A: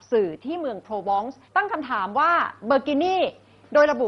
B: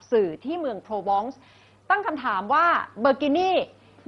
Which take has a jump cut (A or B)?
A